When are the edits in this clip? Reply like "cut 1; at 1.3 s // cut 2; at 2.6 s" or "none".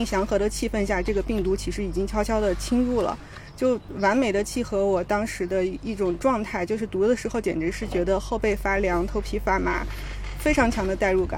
none